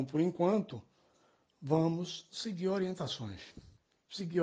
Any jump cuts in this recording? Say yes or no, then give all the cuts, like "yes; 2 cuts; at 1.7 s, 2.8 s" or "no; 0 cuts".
no; 0 cuts